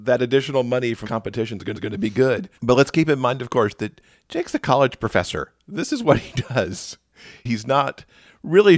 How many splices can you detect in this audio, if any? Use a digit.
4